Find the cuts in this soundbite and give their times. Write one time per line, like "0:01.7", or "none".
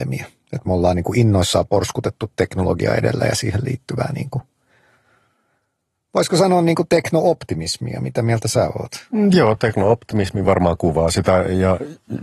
none